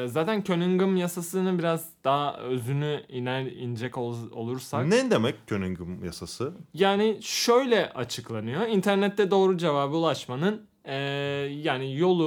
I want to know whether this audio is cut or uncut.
uncut